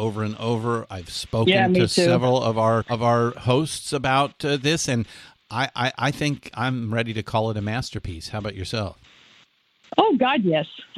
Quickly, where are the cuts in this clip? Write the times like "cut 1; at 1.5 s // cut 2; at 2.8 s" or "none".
cut 1; at 2.8 s